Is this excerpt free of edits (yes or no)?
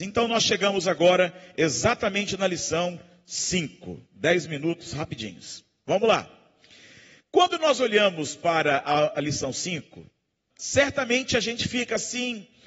no